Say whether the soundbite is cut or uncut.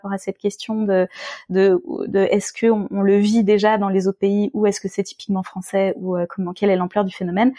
uncut